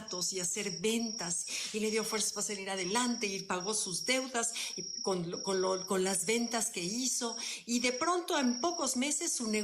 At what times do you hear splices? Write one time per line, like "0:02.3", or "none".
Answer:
none

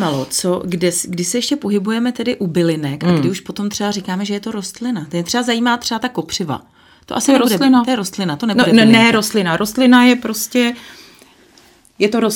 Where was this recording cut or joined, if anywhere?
none

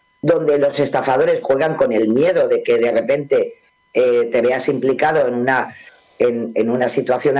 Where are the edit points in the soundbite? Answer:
0:01.4

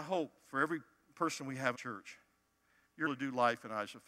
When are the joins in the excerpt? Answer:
0:01.7
0:03.1

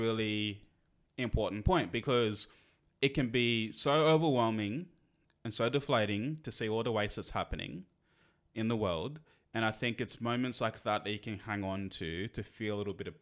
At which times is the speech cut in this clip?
none

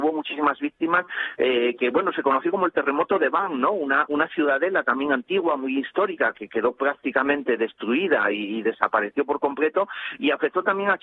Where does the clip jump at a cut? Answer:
none

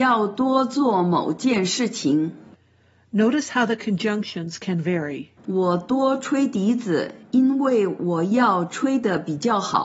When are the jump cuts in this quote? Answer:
0:05.4
0:07.2

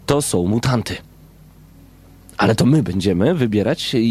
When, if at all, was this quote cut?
none

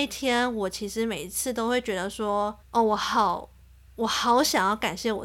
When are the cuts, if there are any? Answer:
0:02.6

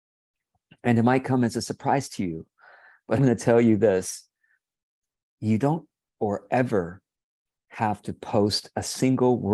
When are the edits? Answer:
0:03.2
0:06.1

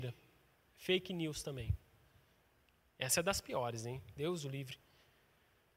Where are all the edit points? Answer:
none

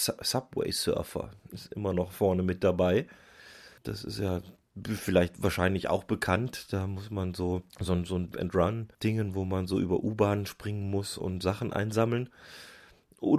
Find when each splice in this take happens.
0:03.8
0:07.7
0:08.3
0:08.9
0:11.2

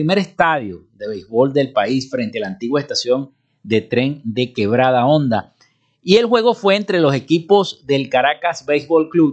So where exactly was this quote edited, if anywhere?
none

